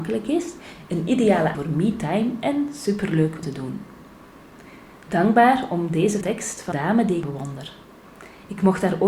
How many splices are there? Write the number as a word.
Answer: five